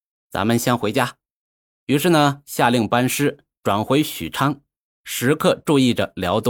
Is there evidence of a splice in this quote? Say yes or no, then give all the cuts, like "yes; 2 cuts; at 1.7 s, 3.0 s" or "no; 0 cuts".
no; 0 cuts